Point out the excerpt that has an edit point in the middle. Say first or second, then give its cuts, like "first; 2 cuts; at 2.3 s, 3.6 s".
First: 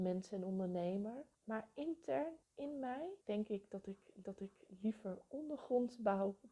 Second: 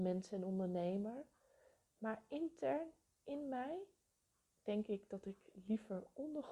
first; 4 cuts; at 1.3 s, 2.4 s, 3.2 s, 4.2 s